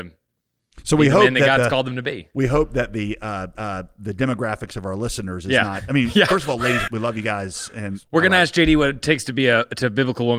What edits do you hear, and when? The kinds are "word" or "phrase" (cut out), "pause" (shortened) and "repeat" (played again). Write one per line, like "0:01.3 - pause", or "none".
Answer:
0:03.6 - repeat
0:06.9 - word